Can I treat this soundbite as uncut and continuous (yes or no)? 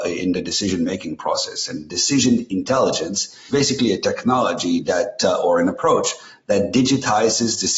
no